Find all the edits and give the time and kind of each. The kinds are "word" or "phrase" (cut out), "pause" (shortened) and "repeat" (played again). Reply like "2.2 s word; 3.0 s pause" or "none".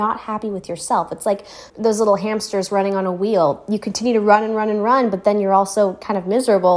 1.7 s pause